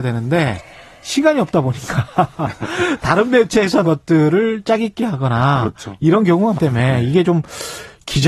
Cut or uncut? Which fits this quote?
cut